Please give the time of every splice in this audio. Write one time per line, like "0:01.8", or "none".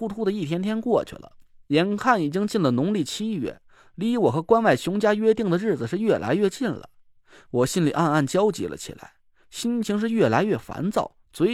none